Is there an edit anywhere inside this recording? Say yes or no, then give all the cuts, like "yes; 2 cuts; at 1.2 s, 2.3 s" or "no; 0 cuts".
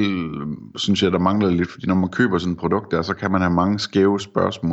no; 0 cuts